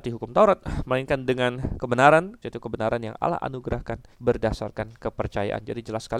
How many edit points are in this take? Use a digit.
2